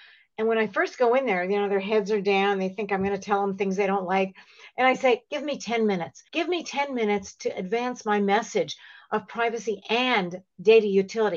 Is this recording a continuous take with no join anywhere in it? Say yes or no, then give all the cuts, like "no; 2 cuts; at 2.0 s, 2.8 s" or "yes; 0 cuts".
no; 1 cut; at 6.3 s